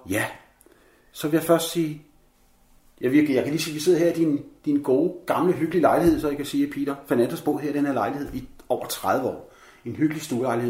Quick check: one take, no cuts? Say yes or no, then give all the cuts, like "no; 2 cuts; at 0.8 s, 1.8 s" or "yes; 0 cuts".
yes; 0 cuts